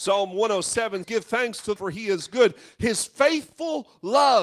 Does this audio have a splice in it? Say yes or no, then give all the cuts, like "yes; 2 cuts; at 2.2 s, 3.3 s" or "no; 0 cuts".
yes; 2 cuts; at 1.0 s, 1.8 s